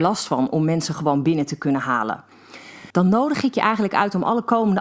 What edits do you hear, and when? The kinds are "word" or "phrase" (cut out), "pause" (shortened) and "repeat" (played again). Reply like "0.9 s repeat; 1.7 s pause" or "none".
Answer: 2.9 s pause